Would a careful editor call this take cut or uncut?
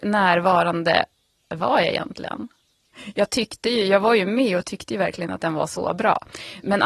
uncut